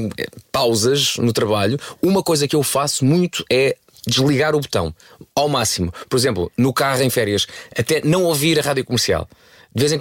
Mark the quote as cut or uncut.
uncut